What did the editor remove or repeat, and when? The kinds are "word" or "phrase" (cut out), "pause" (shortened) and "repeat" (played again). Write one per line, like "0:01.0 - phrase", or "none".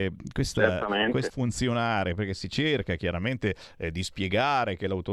0:01.3 - phrase